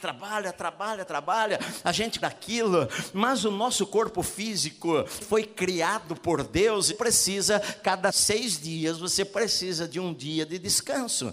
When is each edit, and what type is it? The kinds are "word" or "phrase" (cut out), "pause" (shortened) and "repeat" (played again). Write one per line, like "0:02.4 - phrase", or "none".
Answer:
0:01.1 - word
0:02.2 - phrase
0:05.2 - word
0:06.9 - phrase
0:08.1 - word